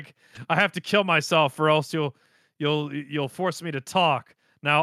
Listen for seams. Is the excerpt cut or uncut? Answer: uncut